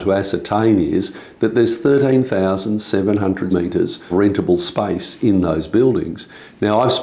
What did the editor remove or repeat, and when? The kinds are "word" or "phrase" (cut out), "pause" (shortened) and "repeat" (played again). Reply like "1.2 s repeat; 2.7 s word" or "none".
3.5 s word; 4.1 s word